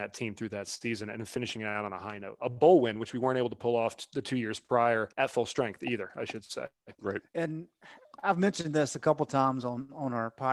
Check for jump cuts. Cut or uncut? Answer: cut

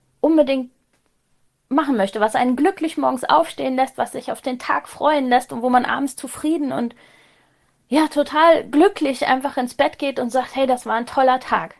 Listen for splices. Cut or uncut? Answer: uncut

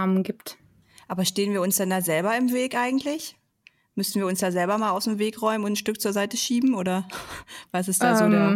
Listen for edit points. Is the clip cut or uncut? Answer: uncut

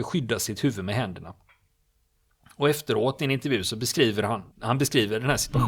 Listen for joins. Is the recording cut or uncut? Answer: cut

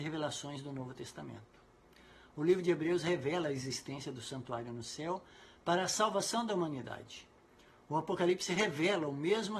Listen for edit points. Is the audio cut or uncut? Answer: uncut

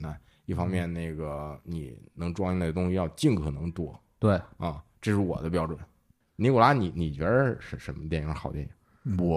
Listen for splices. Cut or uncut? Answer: uncut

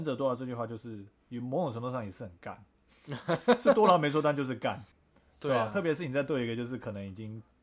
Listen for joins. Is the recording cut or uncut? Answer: cut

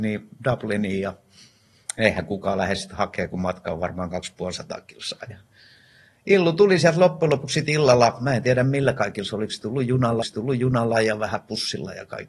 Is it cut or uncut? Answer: cut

